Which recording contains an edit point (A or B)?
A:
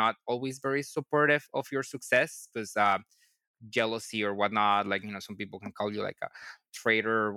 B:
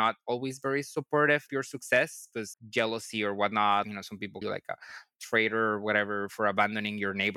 B